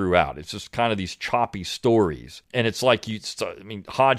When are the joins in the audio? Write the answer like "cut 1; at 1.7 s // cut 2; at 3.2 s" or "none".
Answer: cut 1; at 2.4 s